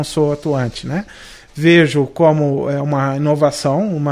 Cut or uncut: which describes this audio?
uncut